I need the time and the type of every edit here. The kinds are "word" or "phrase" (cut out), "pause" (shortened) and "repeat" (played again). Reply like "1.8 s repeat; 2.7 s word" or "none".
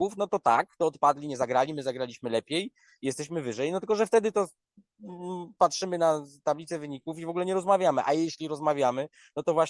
none